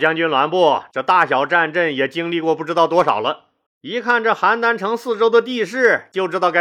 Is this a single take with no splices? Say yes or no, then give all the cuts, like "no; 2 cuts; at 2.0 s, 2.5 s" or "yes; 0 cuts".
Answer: no; 1 cut; at 3.7 s